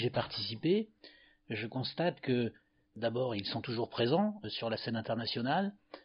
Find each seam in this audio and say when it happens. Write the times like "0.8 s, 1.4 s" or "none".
none

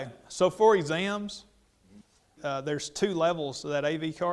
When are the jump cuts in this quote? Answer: 2.4 s

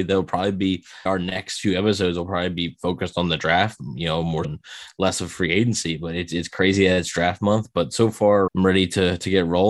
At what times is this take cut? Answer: 1.1 s, 4.4 s, 8.5 s

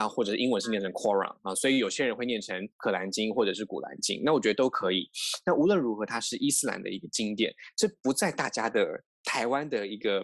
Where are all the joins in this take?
2.7 s

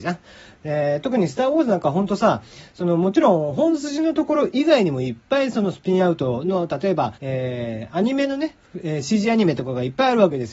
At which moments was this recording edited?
7.2 s

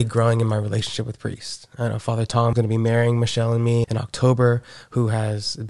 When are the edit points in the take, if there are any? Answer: 2.5 s, 3.8 s

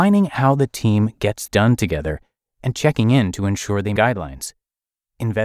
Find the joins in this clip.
1.5 s, 4.0 s

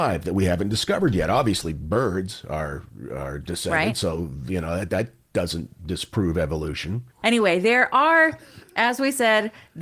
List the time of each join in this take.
7.1 s

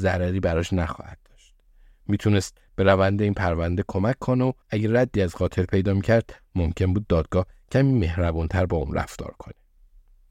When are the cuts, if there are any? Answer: 4.6 s

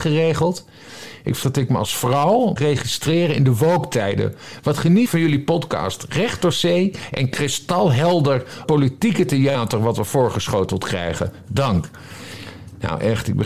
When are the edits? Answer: 1.4 s, 2.6 s, 5.1 s, 8.6 s

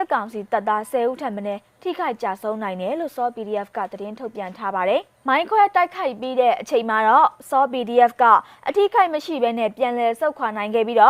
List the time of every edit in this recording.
none

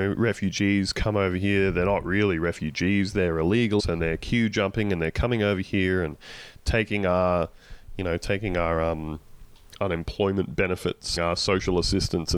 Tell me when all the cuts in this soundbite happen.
3.8 s, 11.2 s

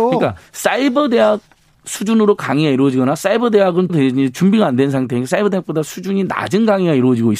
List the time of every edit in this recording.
3.9 s

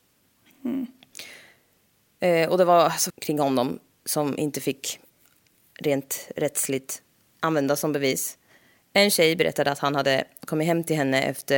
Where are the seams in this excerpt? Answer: 3.1 s

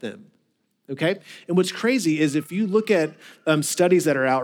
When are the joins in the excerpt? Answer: none

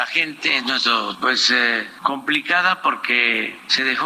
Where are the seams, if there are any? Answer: 1.1 s

